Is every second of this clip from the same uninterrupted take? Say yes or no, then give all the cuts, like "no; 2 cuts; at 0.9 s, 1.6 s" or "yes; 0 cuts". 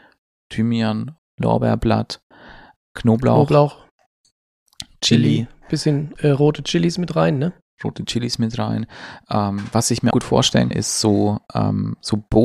no; 5 cuts; at 1.2 s, 2.8 s, 6.2 s, 10.1 s, 10.7 s